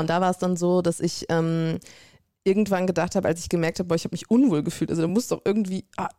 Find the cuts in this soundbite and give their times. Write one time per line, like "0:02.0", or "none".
none